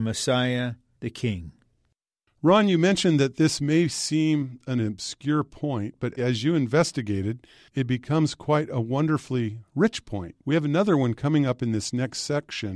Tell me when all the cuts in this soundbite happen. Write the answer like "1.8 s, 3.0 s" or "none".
6.2 s, 10.4 s